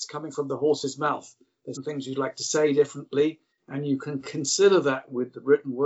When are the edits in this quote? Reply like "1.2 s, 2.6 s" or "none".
1.7 s